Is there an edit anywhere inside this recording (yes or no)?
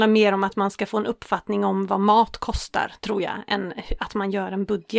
no